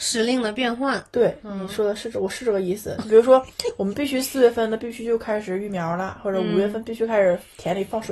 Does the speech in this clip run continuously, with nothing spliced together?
yes; 0 cuts

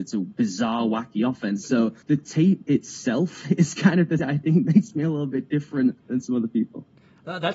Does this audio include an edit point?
yes; 3 cuts; at 2.0 s, 4.2 s, 6.0 s

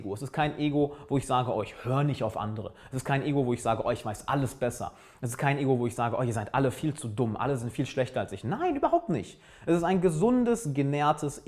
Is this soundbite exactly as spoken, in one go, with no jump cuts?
yes; 0 cuts

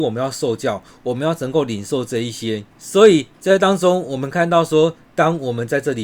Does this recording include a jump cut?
yes; 1 cut; at 2.7 s

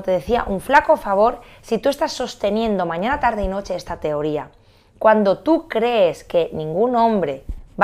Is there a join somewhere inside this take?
no; 0 cuts

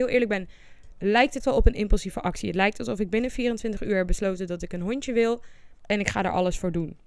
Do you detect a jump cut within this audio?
yes; 2 cuts; at 1.4 s, 5.8 s

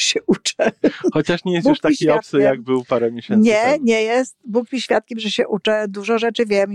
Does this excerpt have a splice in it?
no; 0 cuts

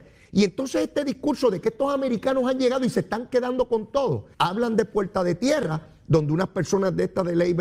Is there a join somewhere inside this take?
yes; 1 cut; at 4.3 s

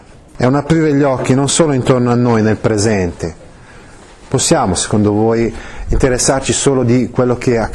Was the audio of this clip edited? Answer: no; 0 cuts

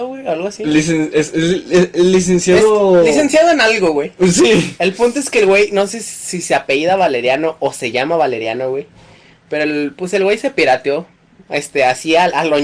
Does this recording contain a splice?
no; 0 cuts

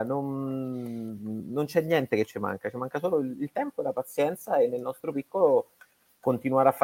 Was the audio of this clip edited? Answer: no; 0 cuts

